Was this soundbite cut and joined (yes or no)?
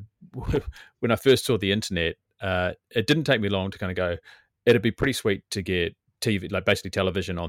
no